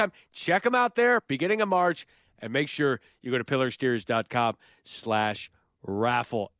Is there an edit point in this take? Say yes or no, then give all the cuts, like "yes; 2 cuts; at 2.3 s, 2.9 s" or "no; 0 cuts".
no; 0 cuts